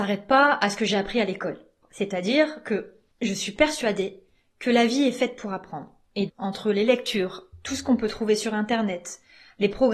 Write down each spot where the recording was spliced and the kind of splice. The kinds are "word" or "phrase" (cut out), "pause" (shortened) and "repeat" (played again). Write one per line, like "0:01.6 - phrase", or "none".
0:06.3 - word